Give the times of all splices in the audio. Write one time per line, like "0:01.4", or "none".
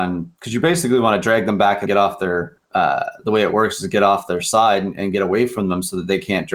0:01.9
0:02.6
0:05.0